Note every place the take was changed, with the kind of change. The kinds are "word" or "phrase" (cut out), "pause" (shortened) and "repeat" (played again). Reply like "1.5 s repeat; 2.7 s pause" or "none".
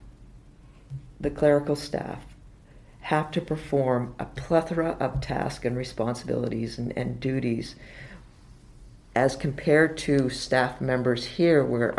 none